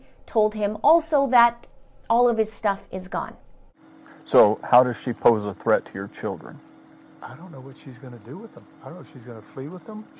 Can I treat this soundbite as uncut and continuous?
yes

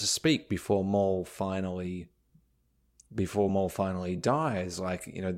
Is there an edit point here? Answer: no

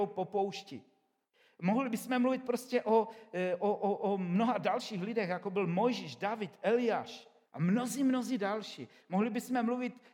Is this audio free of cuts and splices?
no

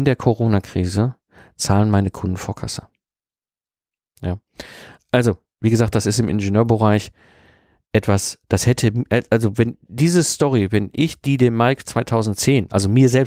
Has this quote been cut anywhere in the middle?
no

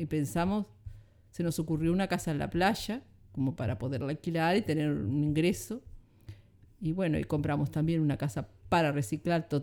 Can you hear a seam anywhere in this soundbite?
no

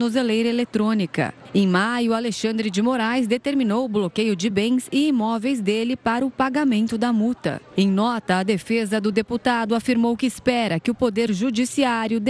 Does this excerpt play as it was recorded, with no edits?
yes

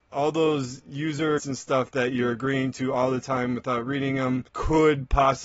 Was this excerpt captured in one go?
no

